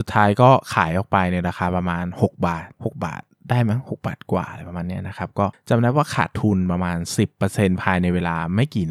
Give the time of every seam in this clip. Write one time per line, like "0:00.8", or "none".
0:02.7
0:03.3